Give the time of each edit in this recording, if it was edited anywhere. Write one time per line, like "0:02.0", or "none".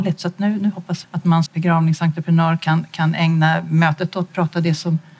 0:01.0
0:01.5
0:04.3